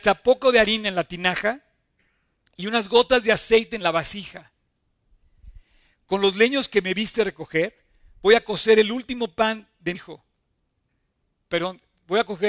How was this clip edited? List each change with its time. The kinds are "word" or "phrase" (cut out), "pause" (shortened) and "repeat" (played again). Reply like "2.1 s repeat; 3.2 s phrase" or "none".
9.9 s word